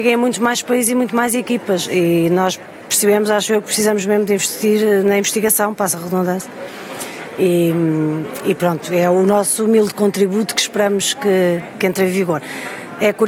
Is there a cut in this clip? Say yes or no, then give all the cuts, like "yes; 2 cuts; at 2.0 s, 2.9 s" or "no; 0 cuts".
no; 0 cuts